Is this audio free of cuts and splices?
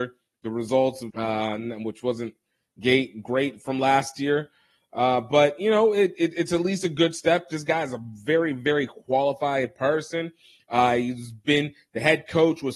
no; 1 cut; at 1.1 s

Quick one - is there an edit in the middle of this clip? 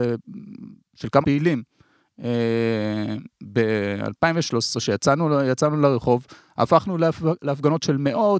yes; 1 cut; at 1.2 s

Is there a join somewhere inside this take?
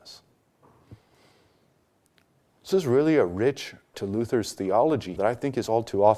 yes; 3 cuts; at 2.7 s, 3.9 s, 5.2 s

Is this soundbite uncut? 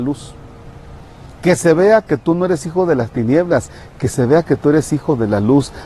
yes; 0 cuts

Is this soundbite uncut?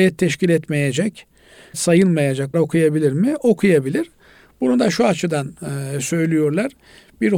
no; 2 cuts; at 1.7 s, 2.5 s

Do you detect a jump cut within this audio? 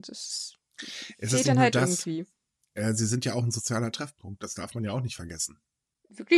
no; 0 cuts

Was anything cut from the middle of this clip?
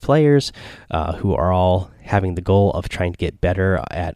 no; 0 cuts

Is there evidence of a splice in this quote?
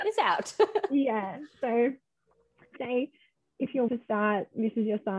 yes; 2 cuts; at 2.8 s, 3.9 s

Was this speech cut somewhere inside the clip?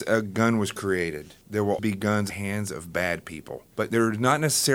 yes; 4 cuts; at 1.4 s, 1.8 s, 2.3 s, 3.7 s

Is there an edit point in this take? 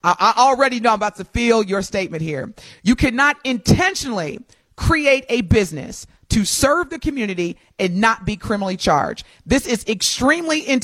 no; 0 cuts

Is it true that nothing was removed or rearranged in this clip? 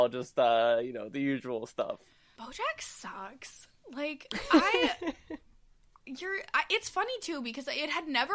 yes; 0 cuts

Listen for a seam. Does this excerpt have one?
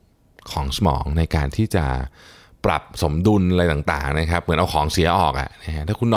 no; 0 cuts

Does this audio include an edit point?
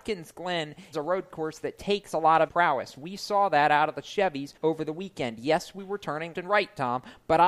yes; 4 cuts; at 0.9 s, 2.5 s, 4.6 s, 6.3 s

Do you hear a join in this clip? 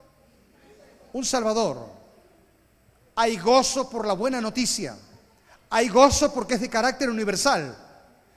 no; 0 cuts

